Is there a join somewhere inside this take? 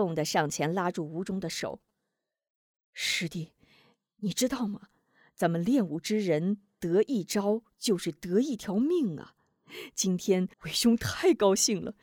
yes; 1 cut; at 10.5 s

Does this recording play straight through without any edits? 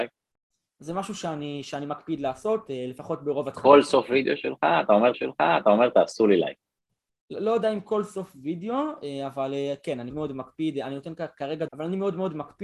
no; 3 cuts; at 5.1 s, 10.1 s, 11.7 s

